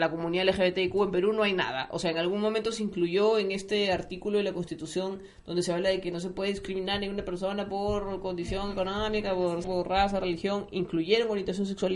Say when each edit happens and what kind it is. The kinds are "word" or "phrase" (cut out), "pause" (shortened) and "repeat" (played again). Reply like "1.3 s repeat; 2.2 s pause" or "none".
9.6 s word